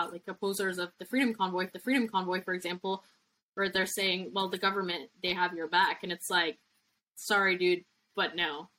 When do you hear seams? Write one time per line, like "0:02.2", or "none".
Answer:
0:01.7